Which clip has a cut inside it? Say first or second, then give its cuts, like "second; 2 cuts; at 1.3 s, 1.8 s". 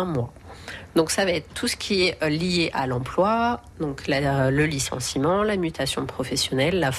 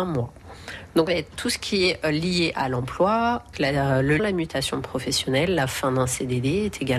second; 3 cuts; at 1.1 s, 3.5 s, 4.2 s